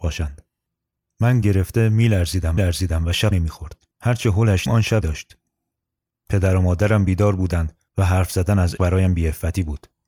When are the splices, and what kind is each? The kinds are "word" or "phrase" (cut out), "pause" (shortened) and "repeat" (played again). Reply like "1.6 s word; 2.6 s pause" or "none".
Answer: 1.4 s word; 2.6 s repeat; 3.3 s word; 3.9 s pause; 4.7 s word; 5.0 s phrase; 7.9 s pause; 8.8 s word